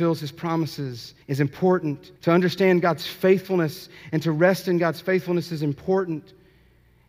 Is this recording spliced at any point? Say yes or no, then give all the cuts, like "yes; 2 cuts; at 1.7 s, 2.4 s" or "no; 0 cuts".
yes; 2 cuts; at 1.2 s, 2.2 s